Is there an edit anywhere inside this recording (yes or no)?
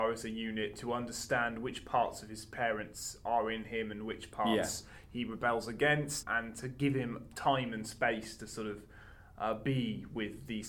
yes